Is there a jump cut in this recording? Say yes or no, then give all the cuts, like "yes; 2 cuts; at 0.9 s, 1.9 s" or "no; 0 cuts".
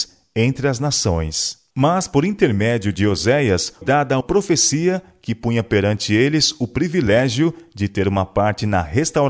yes; 3 cuts; at 1.7 s, 3.8 s, 4.2 s